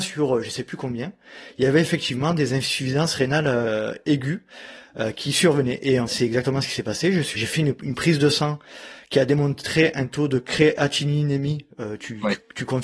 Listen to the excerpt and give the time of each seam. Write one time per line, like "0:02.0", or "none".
0:06.1
0:07.4